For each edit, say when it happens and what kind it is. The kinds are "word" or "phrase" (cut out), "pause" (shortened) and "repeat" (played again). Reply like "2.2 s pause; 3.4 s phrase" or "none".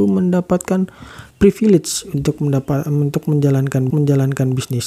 1.3 s pause; 3.9 s repeat